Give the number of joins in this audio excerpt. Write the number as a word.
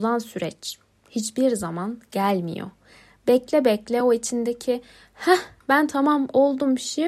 zero